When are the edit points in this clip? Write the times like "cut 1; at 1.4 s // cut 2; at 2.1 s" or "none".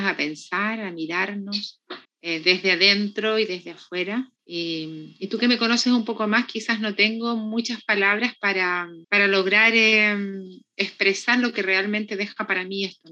cut 1; at 2.0 s // cut 2; at 4.4 s // cut 3; at 9.0 s